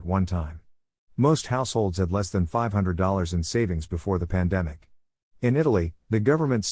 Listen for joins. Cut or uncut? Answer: uncut